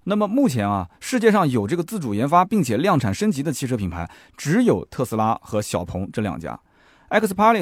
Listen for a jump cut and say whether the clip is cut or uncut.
uncut